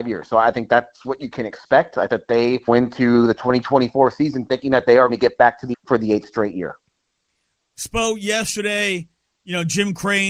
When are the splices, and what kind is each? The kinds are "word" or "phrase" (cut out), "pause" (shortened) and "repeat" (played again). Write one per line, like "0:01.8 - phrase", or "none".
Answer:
0:02.1 - word
0:02.7 - word
0:05.1 - word
0:05.7 - word